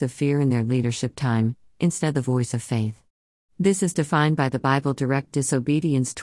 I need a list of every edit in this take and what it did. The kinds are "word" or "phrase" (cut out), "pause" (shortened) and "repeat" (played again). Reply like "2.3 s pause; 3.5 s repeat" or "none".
none